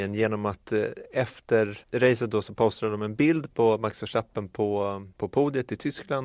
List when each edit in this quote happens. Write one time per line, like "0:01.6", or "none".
0:01.8
0:05.1